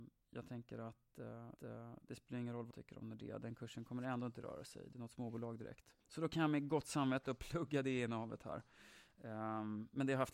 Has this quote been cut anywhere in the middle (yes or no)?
yes